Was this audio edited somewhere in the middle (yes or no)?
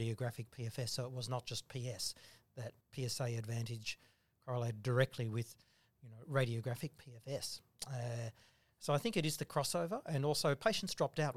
yes